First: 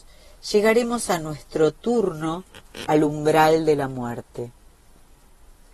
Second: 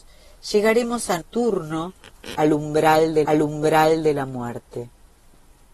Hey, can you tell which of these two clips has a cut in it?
second; 2 cuts; at 1.2 s, 3.2 s

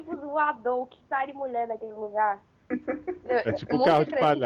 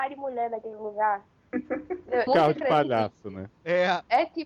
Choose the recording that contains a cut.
second; 1 cut; at 2.3 s

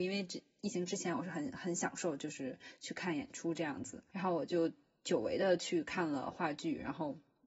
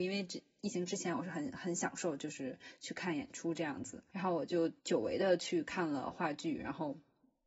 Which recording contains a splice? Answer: second; 1 cut; at 4.8 s

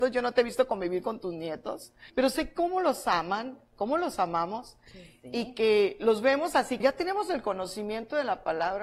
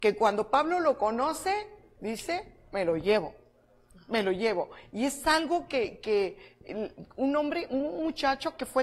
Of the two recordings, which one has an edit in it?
first; 2 cuts; at 2.1 s, 6.8 s

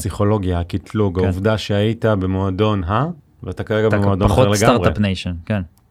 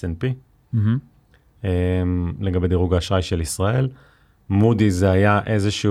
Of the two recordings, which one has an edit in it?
first; 1 cut; at 3.2 s

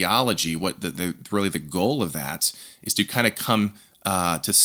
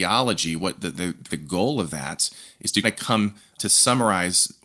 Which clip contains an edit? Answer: second; 3 cuts; at 1.3 s, 2.8 s, 3.6 s

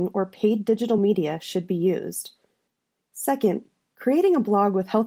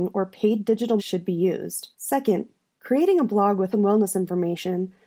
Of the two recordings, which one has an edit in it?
second; 3 cuts; at 1.0 s, 1.9 s, 3.7 s

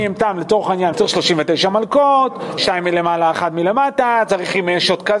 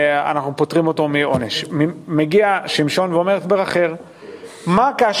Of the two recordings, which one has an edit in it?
first; 2 cuts; at 0.9 s, 2.6 s

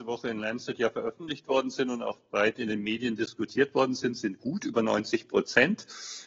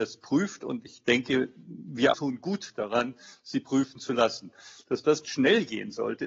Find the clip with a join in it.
second; 2 cuts; at 2.1 s, 5.2 s

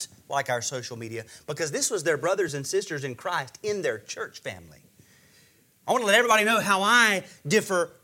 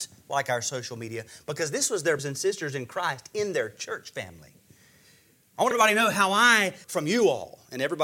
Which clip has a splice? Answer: second; 3 cuts; at 2.2 s, 5.7 s, 6.8 s

